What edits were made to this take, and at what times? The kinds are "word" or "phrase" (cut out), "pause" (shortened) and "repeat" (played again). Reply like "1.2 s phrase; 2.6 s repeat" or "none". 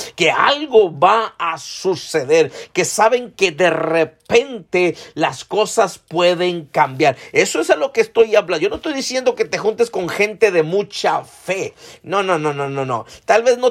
none